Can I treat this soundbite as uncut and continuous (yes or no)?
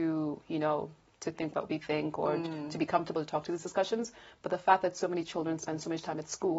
yes